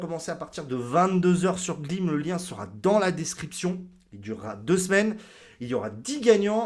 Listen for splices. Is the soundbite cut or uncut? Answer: uncut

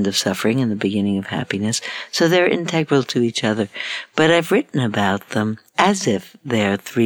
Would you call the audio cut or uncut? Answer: cut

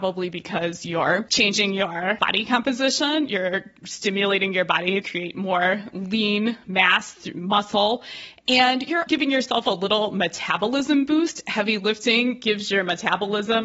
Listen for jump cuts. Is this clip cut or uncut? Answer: cut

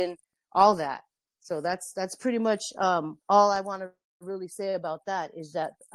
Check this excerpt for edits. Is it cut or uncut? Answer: cut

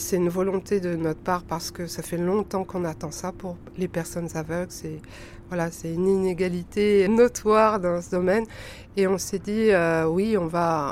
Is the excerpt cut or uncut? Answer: cut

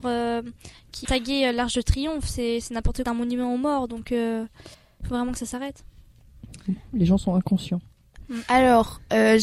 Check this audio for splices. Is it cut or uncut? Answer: cut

